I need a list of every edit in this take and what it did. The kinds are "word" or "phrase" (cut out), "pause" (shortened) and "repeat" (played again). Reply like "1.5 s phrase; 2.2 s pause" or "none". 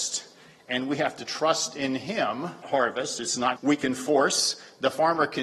2.6 s phrase; 3.6 s word